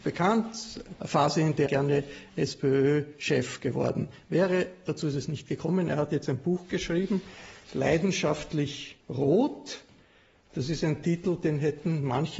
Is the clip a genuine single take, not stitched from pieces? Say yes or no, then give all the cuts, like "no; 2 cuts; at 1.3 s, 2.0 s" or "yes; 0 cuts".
no; 3 cuts; at 1.0 s, 1.7 s, 9.0 s